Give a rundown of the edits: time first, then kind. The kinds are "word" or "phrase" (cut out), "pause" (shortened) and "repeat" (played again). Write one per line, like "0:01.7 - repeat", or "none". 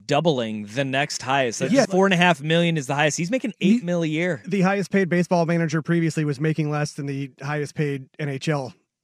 0:01.8 - word